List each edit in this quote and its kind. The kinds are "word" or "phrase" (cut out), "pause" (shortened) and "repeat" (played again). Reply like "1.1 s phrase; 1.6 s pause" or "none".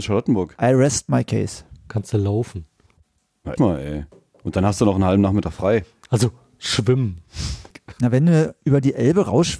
3.6 s word; 7.7 s word